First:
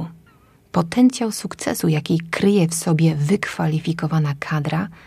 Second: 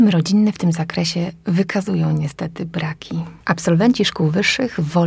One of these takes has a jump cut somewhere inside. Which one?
second; 1 cut; at 3.4 s

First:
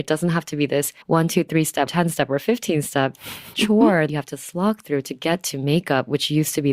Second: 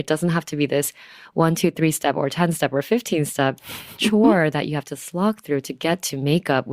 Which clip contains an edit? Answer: first; 3 cuts; at 1.0 s, 1.9 s, 4.1 s

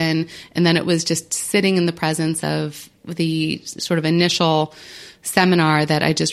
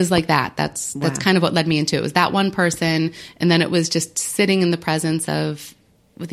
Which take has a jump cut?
first; 1 cut; at 3.0 s

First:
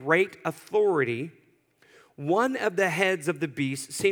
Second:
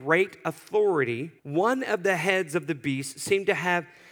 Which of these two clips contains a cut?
second; 1 cut; at 1.4 s

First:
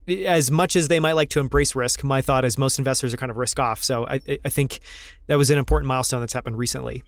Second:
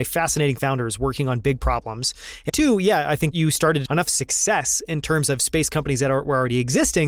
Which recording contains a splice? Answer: second; 3 cuts; at 2.5 s, 3.3 s, 3.9 s

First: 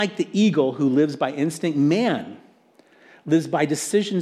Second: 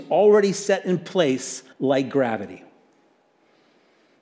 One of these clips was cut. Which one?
second; 1 cut; at 1.7 s

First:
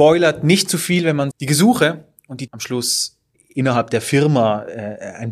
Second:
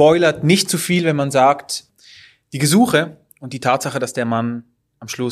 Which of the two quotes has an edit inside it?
first; 3 cuts; at 1.3 s, 2.5 s, 3.3 s

